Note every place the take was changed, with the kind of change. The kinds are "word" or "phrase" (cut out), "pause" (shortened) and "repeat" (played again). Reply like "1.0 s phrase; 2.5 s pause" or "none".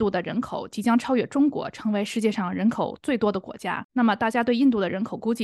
3.9 s pause

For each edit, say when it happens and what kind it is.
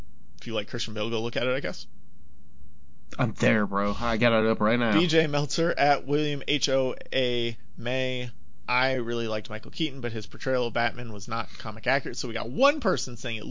none

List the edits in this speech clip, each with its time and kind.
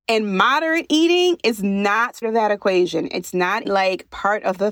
2.2 s word; 3.6 s word

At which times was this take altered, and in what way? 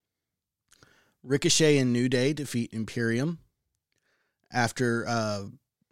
none

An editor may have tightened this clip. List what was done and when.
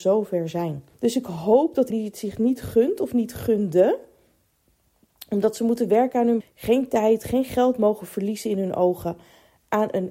0.9 s pause; 1.9 s word; 6.4 s word

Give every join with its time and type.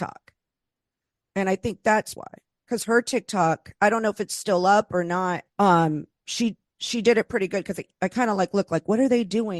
2.2 s word; 5.5 s pause

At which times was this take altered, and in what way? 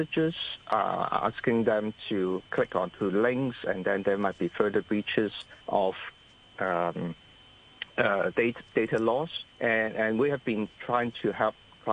2.4 s pause; 5.6 s pause; 9.5 s pause

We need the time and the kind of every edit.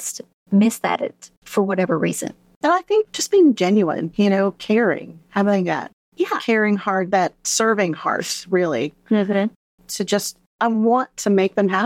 none

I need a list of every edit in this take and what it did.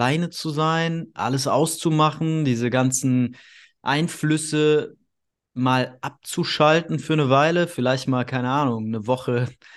none

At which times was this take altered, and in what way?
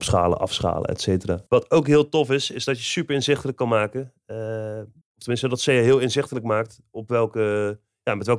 1.5 s pause; 5.0 s pause

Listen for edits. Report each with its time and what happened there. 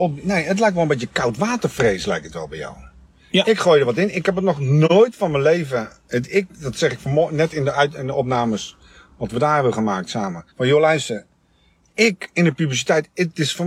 10.5 s pause

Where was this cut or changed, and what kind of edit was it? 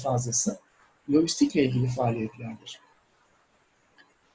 none

